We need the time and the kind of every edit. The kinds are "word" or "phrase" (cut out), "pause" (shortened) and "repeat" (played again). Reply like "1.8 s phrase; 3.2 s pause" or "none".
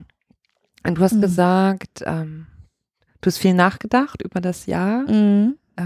none